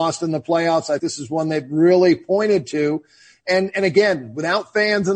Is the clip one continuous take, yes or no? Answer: no